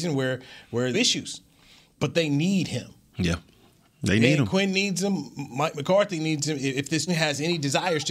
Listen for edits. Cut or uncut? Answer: cut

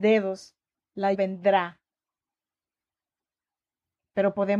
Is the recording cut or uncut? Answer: cut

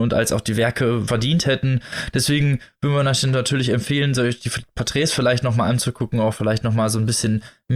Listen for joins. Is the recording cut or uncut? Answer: cut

